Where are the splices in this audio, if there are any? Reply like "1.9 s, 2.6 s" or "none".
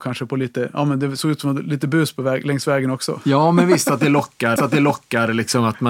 4.6 s